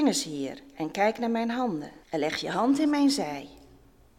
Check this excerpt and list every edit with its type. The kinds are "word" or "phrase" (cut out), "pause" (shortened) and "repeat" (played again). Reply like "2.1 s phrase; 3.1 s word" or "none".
2.0 s pause